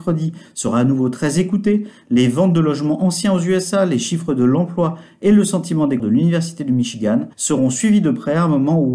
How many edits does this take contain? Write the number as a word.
two